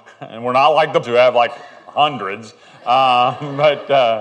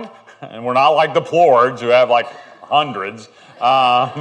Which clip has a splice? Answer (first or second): first